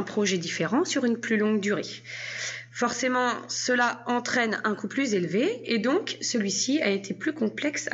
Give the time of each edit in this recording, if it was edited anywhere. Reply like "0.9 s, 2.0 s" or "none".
none